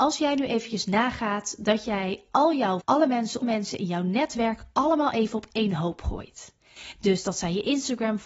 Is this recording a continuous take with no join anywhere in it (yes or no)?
no